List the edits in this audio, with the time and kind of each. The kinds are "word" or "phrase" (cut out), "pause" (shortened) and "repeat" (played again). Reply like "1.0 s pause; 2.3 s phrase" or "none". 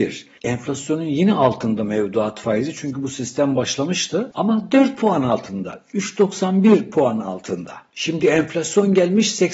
none